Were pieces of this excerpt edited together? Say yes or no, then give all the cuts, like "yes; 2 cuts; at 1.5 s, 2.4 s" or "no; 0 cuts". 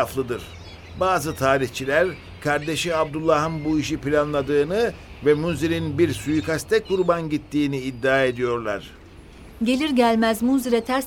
no; 0 cuts